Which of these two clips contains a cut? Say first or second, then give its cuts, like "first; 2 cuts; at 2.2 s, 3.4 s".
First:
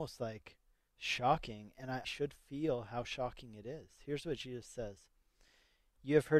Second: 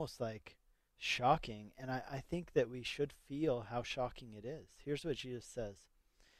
first; 1 cut; at 2.0 s